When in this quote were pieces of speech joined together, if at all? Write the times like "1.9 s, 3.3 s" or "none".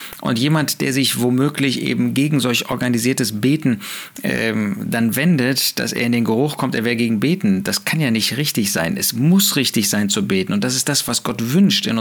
none